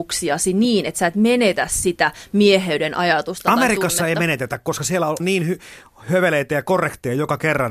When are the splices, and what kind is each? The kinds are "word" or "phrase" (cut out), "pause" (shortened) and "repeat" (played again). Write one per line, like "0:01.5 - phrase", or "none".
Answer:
0:05.2 - word

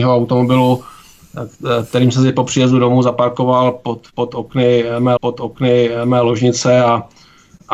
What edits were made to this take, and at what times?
0:05.2 - repeat

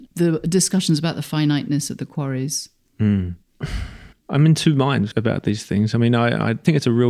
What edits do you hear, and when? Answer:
0:02.9 - pause
0:04.1 - pause

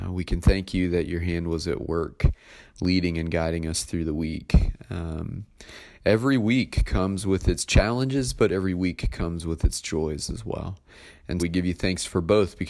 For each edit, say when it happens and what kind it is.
0:11.4 - word

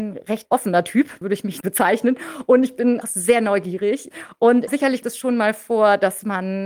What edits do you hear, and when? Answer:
0:01.2 - word
0:01.6 - word
0:03.0 - word
0:04.7 - word
0:05.0 - word

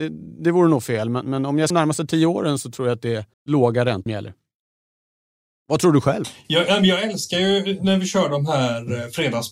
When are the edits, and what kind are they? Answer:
0:01.7 - phrase
0:03.3 - pause
0:04.1 - word

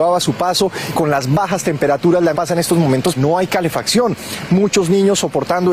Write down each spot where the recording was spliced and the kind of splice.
0:00.9 - word
0:02.3 - word
0:03.2 - word

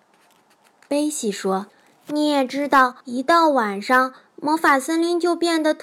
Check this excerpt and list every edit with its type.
0:01.7 - pause
0:03.0 - pause

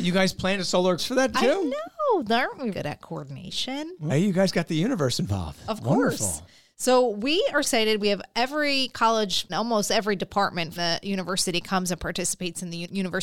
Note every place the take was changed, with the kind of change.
0:01.0 - word
0:01.3 - word
0:02.7 - word
0:04.1 - word
0:07.6 - word
0:09.5 - word
0:10.8 - word

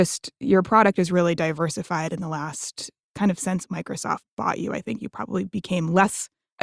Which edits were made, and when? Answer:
none

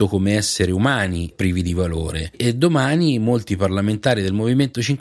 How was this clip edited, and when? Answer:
0:01.3 - phrase

